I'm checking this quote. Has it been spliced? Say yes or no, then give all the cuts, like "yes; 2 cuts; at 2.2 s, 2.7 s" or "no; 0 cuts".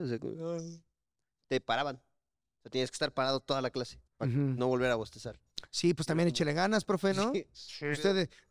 yes; 1 cut; at 4.1 s